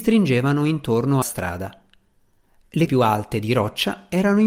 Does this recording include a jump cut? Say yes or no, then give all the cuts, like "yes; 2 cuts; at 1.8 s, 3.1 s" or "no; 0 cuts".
yes; 2 cuts; at 1.2 s, 2.9 s